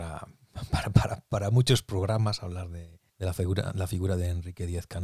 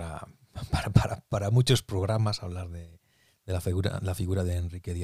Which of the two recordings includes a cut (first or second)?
first